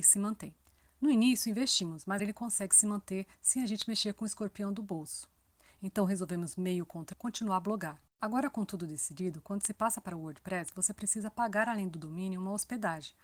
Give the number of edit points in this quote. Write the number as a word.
three